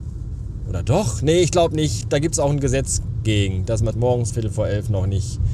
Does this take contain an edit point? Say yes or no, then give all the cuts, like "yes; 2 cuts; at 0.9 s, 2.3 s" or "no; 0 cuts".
yes; 3 cuts; at 2.0 s, 3.9 s, 4.3 s